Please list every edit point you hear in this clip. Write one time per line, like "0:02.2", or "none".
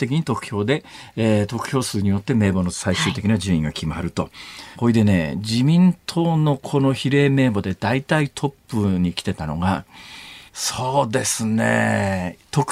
0:04.7
0:10.5